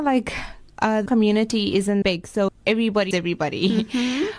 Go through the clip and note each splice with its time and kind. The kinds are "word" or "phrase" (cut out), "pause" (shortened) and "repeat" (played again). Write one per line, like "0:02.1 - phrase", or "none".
0:01.1 - word
0:02.0 - word
0:02.5 - word
0:03.1 - word